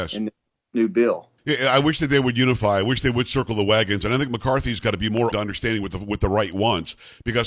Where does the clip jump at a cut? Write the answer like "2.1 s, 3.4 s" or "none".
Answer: 1.4 s, 5.3 s